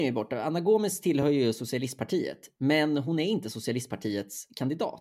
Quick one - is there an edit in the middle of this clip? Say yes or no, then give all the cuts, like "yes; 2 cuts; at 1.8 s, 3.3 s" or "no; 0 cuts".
no; 0 cuts